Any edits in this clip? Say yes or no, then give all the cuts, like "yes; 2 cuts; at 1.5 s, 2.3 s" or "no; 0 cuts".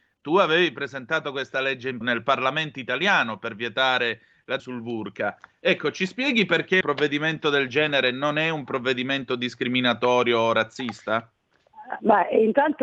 yes; 3 cuts; at 2.0 s, 4.6 s, 6.8 s